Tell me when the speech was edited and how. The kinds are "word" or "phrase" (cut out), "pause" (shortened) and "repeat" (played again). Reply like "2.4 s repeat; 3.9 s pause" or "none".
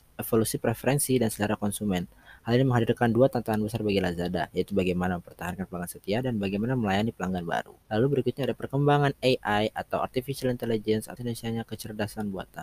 7.8 s pause; 11.2 s word